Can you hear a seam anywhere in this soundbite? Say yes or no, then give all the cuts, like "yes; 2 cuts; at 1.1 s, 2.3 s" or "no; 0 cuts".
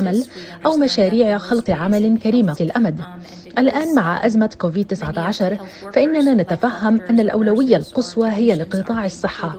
yes; 2 cuts; at 1.7 s, 2.6 s